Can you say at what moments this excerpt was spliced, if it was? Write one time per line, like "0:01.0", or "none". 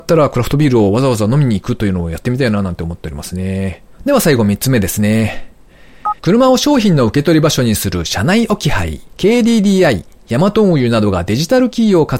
0:03.9
0:06.2
0:09.1